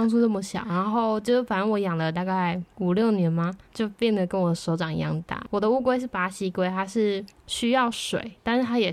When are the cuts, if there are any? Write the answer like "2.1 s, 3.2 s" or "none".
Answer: 2.7 s, 3.6 s, 7.3 s

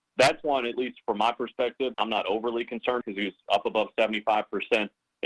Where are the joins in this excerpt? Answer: 1.9 s, 3.0 s

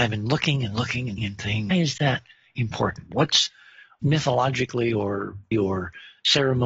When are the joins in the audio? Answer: 1.2 s, 1.7 s, 4.0 s, 5.5 s

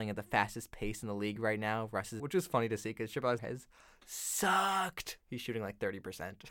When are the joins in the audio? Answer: 2.2 s, 3.4 s, 5.2 s

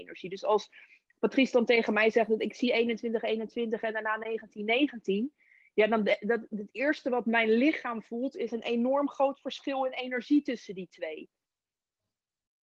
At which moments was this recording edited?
none

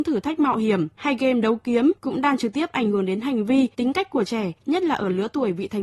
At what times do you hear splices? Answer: 2.0 s, 3.7 s, 4.6 s

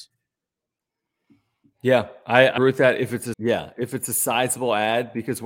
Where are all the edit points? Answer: 2.6 s, 3.3 s

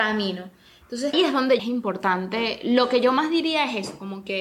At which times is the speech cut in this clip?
1.1 s, 1.6 s

